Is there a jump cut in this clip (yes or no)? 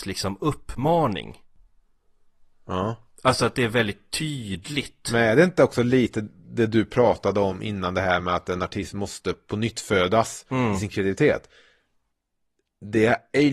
no